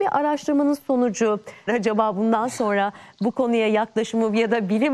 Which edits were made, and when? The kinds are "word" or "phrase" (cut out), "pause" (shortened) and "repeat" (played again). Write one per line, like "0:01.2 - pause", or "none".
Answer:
0:01.7 - phrase